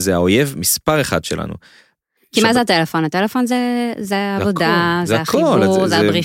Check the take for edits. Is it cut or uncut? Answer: uncut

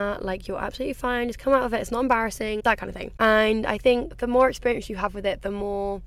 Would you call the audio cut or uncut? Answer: cut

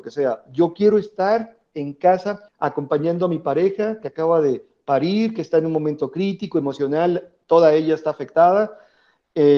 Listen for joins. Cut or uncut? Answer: cut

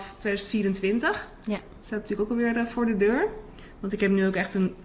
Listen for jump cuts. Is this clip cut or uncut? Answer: uncut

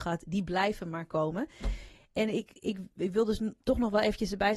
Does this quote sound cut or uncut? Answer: uncut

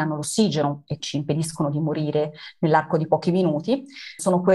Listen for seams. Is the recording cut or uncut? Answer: cut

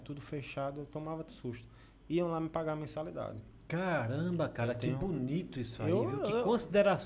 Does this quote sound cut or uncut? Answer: cut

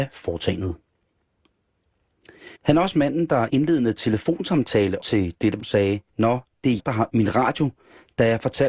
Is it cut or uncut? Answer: cut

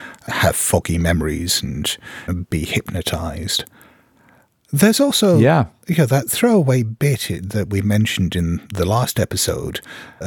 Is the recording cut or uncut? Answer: uncut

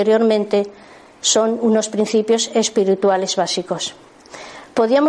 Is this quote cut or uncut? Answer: uncut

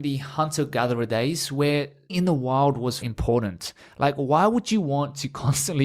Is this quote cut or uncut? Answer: cut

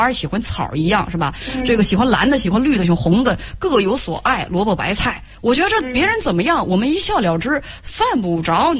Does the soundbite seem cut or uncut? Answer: uncut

